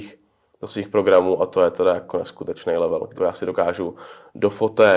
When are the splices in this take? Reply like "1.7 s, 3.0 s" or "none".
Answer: 3.2 s